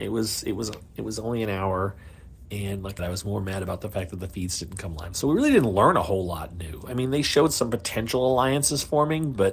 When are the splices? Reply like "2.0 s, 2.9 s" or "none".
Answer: 3.0 s